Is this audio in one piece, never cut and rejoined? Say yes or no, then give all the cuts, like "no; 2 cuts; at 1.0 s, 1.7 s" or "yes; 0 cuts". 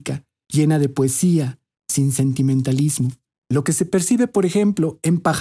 yes; 0 cuts